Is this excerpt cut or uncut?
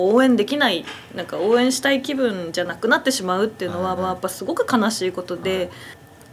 cut